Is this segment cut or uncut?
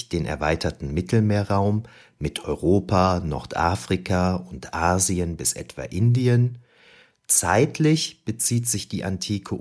uncut